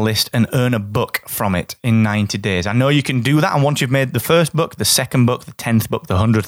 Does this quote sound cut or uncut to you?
uncut